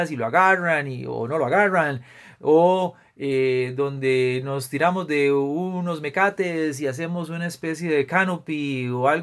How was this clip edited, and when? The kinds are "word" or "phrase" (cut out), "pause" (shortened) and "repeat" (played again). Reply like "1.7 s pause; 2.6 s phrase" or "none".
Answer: none